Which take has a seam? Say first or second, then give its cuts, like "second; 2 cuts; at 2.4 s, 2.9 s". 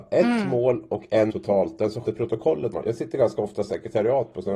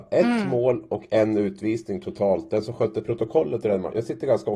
first; 3 cuts; at 1.3 s, 2.0 s, 2.7 s